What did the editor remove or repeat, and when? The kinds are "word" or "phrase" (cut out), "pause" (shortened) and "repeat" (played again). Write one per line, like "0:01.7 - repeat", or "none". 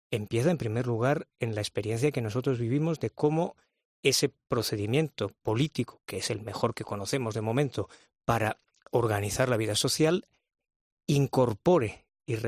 none